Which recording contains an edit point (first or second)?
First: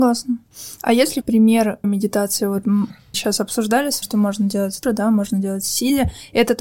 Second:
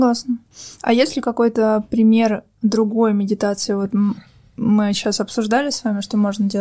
first